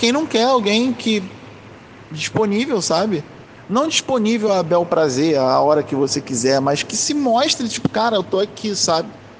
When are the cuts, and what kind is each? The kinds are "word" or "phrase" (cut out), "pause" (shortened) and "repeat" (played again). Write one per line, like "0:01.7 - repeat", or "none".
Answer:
none